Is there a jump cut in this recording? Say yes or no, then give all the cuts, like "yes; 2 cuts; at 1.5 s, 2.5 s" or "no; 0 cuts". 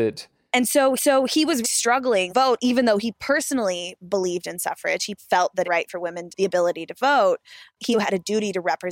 yes; 7 cuts; at 1.0 s, 1.6 s, 2.3 s, 5.2 s, 5.6 s, 6.3 s, 7.9 s